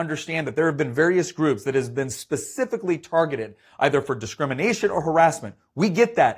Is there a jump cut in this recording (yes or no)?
no